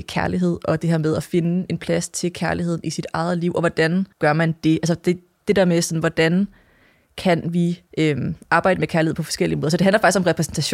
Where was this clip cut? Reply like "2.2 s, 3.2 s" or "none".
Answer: 4.1 s, 7.9 s